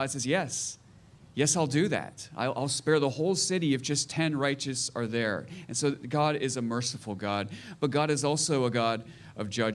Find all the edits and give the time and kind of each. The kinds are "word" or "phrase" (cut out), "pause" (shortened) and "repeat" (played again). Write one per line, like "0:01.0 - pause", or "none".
none